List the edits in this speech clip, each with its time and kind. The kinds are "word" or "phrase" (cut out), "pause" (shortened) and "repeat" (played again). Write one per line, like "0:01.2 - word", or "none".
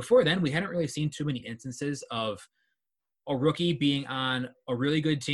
none